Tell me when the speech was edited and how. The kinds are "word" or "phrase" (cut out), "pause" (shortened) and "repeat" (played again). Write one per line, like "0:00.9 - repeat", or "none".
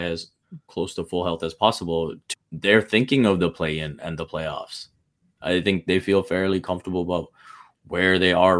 0:02.3 - word